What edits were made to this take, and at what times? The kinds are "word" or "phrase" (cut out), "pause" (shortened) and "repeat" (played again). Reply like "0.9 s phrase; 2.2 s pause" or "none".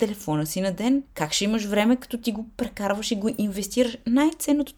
1.1 s pause